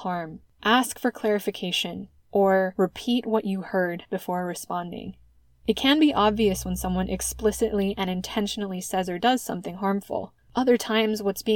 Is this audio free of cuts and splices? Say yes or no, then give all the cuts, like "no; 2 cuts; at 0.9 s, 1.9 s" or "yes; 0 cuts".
yes; 0 cuts